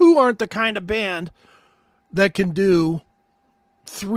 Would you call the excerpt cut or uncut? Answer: uncut